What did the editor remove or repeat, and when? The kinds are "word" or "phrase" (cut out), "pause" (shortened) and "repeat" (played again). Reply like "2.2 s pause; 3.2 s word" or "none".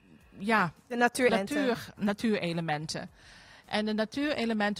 1.3 s word; 2.0 s word